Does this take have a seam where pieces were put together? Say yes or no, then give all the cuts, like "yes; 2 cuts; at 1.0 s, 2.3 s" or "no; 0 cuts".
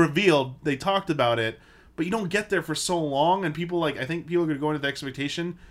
no; 0 cuts